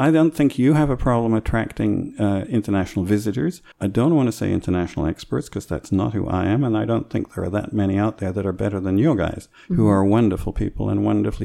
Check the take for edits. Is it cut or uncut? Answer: cut